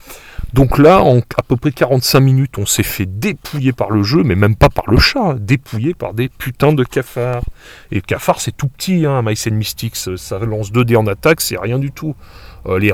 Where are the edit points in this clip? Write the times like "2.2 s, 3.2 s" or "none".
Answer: none